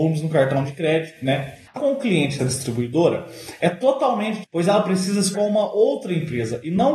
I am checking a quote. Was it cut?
yes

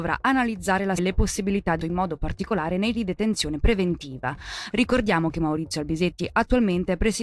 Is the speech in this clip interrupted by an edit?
yes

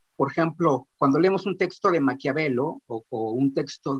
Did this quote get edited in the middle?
yes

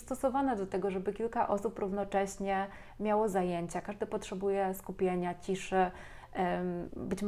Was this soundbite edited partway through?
no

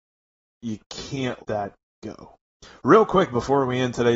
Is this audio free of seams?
no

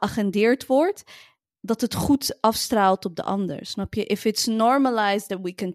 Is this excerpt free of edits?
yes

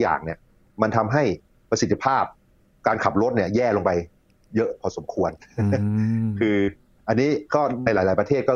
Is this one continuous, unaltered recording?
yes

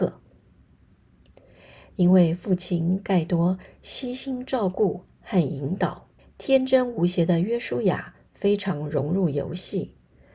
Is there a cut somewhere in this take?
yes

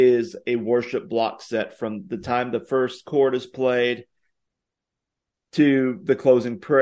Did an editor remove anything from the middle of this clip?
no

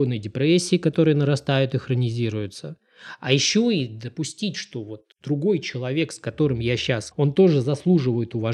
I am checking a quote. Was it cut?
yes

